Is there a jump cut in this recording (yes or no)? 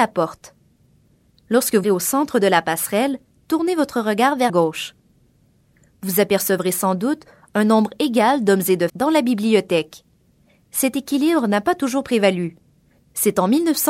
yes